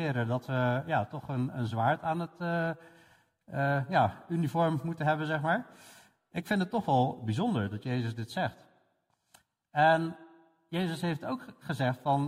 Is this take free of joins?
yes; 0 cuts

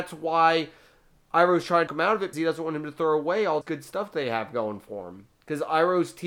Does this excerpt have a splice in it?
yes; 3 cuts; at 1.9 s, 2.3 s, 3.6 s

